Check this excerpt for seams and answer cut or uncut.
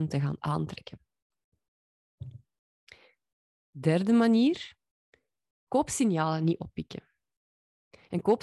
uncut